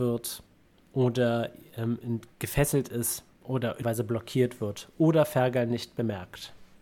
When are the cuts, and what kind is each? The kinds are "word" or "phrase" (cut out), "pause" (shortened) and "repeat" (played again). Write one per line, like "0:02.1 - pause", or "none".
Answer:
0:03.3 - pause
0:03.8 - phrase